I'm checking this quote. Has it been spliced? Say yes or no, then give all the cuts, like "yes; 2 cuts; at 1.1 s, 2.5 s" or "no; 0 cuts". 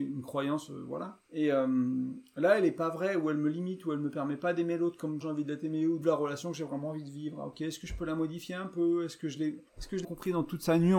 yes; 5 cuts; at 1.2 s, 5.2 s, 6.0 s, 9.7 s, 10.0 s